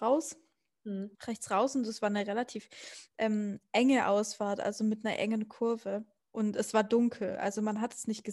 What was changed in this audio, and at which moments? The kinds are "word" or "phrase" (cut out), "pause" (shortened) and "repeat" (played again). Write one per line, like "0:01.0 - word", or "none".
0:01.1 - pause
0:06.2 - pause